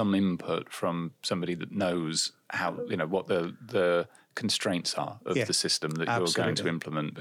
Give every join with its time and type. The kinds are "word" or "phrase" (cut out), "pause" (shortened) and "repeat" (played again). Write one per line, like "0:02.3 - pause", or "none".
none